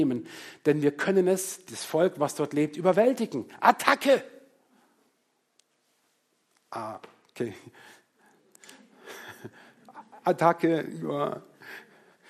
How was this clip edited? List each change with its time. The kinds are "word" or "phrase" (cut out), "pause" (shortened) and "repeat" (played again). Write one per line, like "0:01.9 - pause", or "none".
none